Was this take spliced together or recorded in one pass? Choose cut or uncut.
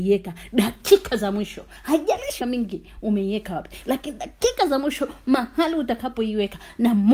cut